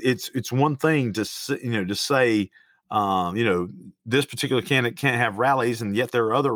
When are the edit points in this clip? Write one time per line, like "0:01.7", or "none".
none